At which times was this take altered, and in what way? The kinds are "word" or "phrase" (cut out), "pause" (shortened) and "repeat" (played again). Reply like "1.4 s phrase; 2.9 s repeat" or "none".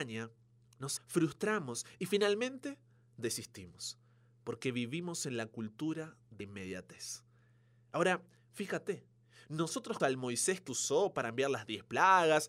1.0 s word; 6.4 s word; 10.0 s word; 10.7 s word